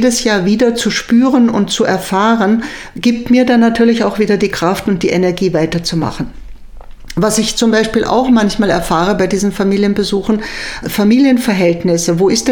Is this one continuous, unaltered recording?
no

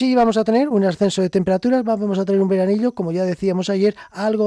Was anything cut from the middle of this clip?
no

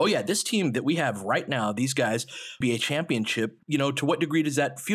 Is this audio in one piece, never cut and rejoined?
no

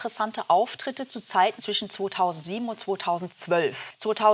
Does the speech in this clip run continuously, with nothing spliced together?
no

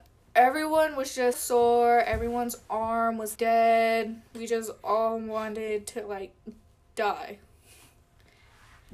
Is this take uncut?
no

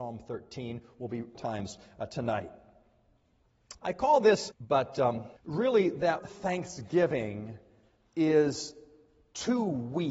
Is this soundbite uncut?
no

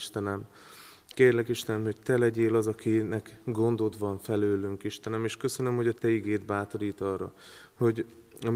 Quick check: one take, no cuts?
yes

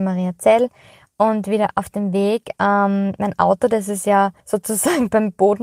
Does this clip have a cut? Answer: yes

